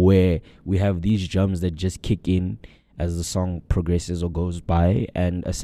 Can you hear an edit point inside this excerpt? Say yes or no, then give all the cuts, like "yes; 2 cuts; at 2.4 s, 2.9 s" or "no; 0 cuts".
no; 0 cuts